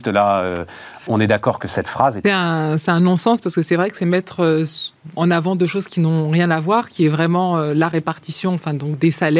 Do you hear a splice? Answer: yes; 2 cuts; at 2.2 s, 5.1 s

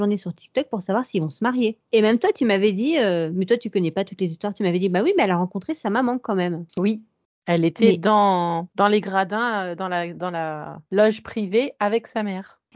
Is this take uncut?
yes; 0 cuts

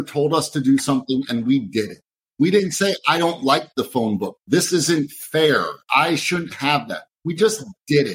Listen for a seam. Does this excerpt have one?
no; 0 cuts

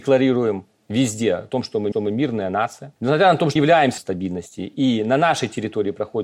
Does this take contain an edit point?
yes; 4 cuts; at 1.9 s, 3.0 s, 3.6 s, 4.0 s

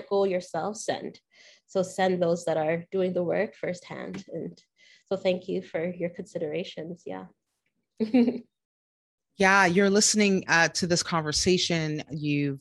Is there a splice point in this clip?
no; 0 cuts

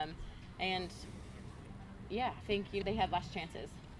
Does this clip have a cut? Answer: yes; 2 cuts; at 2.4 s, 2.8 s

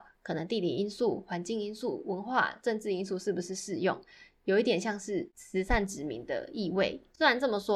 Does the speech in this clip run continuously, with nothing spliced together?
yes; 0 cuts

